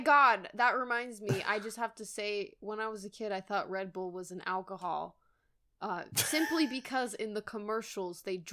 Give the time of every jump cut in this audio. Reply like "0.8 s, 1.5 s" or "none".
none